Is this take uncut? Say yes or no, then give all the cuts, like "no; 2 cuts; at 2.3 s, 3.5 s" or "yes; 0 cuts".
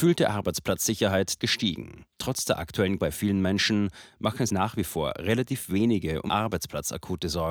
no; 5 cuts; at 1.4 s, 2.1 s, 3.0 s, 4.5 s, 6.3 s